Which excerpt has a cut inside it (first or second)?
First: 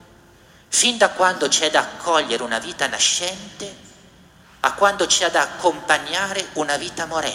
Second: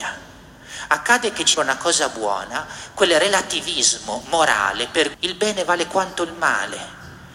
second